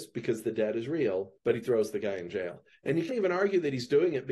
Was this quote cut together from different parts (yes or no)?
yes